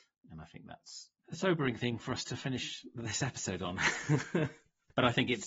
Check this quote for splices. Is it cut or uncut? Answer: cut